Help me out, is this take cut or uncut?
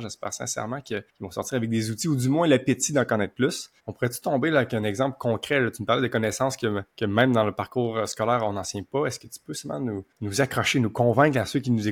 cut